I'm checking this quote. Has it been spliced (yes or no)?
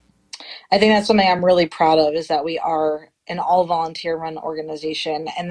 no